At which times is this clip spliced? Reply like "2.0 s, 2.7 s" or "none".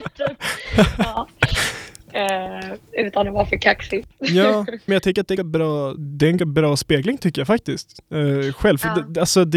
4.9 s, 5.4 s, 6.0 s, 6.4 s